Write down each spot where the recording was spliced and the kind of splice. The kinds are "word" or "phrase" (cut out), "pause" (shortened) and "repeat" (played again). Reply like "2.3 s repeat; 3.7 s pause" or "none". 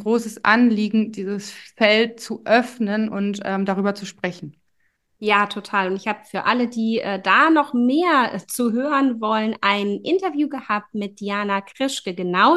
none